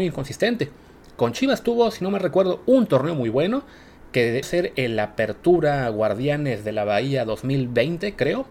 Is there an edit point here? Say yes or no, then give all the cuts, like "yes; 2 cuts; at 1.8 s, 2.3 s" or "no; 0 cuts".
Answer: yes; 1 cut; at 4.4 s